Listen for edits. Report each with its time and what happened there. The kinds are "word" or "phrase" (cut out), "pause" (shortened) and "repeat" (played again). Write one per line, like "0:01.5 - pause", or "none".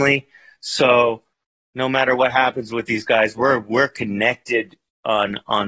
none